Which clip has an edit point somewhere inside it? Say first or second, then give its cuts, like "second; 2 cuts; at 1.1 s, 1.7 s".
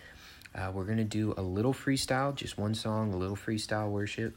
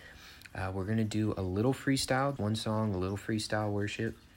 second; 1 cut; at 2.4 s